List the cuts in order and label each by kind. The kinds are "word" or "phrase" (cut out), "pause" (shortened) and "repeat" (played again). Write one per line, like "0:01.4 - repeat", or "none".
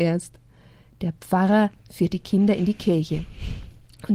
none